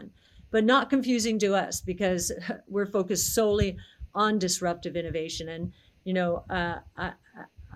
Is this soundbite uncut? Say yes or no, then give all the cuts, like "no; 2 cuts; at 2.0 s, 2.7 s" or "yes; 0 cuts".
yes; 0 cuts